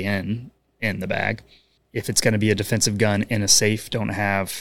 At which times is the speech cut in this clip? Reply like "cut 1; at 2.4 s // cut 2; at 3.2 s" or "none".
cut 1; at 1.8 s